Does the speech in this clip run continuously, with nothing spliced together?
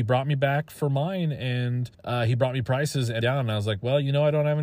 no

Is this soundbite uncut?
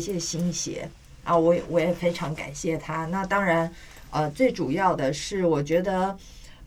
yes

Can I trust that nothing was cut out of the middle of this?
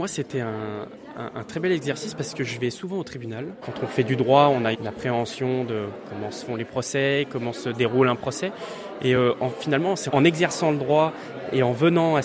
yes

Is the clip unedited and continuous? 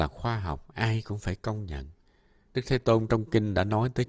yes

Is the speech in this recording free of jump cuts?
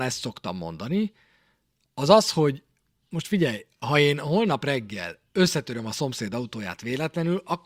yes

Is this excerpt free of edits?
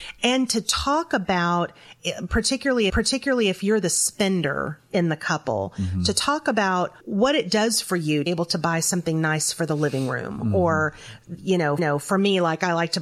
no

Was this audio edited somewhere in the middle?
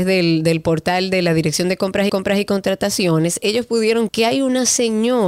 yes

